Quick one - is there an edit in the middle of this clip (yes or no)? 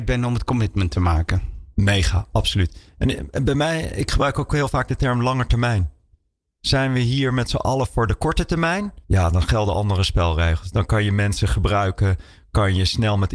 yes